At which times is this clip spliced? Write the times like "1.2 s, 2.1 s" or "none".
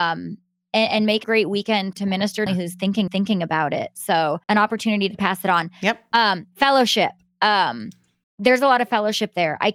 1.2 s, 1.9 s, 2.5 s, 3.1 s, 4.4 s, 8.2 s